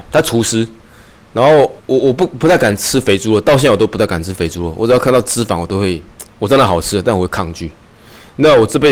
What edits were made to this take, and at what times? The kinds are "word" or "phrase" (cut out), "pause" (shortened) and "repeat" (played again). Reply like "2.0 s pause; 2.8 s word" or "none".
1.8 s pause; 6.3 s pause